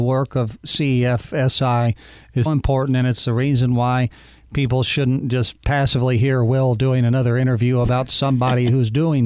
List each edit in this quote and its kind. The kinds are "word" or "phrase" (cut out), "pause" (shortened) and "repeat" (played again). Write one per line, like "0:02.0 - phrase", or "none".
0:02.5 - word